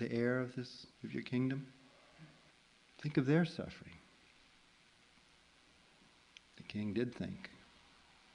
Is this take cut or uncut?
cut